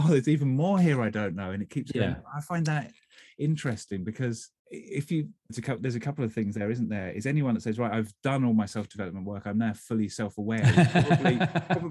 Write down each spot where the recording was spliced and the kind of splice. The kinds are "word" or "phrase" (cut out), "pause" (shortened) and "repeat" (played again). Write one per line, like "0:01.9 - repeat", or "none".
0:04.6 - pause
0:05.5 - word